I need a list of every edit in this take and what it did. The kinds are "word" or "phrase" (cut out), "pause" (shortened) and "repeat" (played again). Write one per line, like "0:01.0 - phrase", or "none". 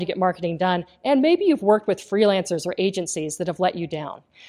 none